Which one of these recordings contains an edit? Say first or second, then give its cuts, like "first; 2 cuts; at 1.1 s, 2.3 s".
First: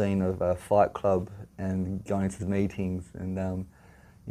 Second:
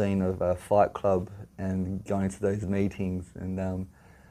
first; 1 cut; at 2.4 s